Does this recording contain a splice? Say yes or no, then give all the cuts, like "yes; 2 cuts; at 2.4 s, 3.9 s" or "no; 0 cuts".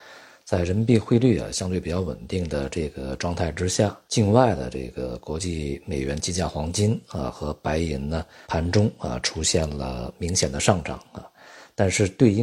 yes; 2 cuts; at 4.0 s, 8.4 s